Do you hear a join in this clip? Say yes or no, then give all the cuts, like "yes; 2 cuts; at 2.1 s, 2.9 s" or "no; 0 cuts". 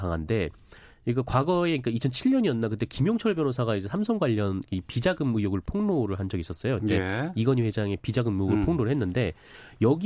no; 0 cuts